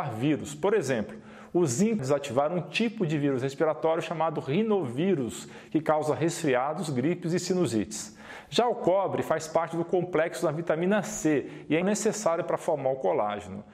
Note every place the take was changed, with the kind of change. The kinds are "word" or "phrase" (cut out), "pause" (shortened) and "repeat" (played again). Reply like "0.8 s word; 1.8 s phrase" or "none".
2.0 s phrase; 11.8 s word